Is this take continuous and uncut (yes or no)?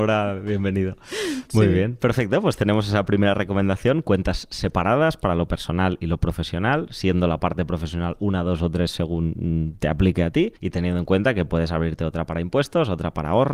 no